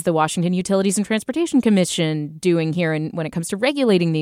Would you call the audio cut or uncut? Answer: uncut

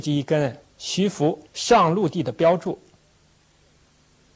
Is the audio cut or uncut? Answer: cut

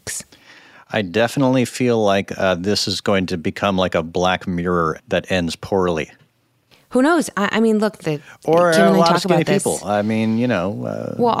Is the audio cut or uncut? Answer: cut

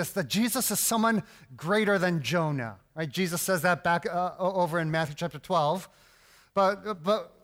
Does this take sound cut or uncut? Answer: uncut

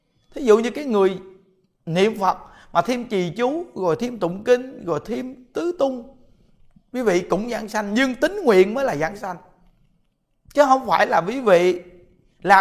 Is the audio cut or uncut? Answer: uncut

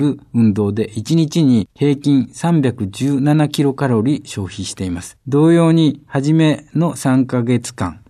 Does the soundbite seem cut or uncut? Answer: cut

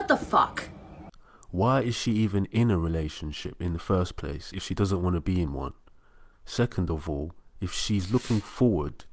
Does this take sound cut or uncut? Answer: uncut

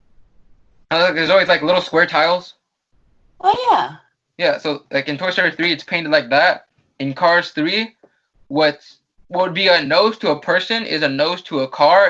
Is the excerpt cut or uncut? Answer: uncut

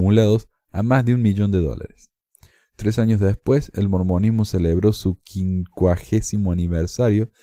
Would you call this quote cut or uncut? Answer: uncut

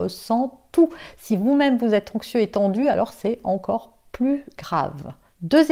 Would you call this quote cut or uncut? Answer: uncut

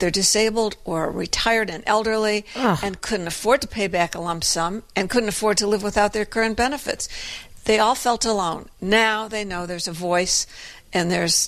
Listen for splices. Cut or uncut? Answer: uncut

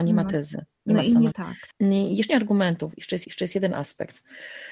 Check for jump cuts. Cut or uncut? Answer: cut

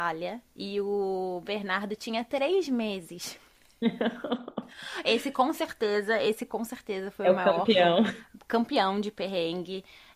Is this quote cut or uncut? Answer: uncut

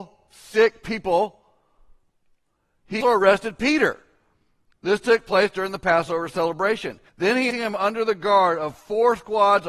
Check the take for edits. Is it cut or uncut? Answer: cut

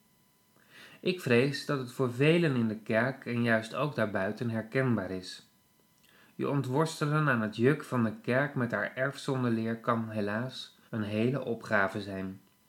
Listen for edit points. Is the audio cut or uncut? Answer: cut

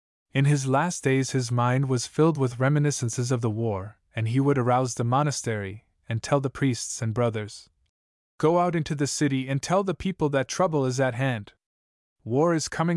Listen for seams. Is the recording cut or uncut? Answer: uncut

